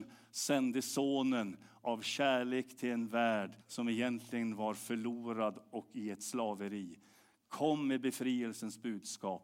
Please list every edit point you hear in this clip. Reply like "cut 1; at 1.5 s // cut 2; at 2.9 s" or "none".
cut 1; at 3.6 s